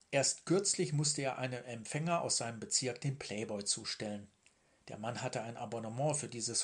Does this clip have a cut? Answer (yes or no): no